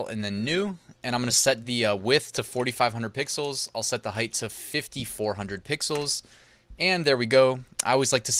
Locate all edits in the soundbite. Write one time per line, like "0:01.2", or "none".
none